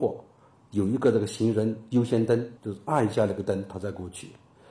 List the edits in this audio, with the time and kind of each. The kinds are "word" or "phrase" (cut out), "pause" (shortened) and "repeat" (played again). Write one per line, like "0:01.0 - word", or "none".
0:02.6 - pause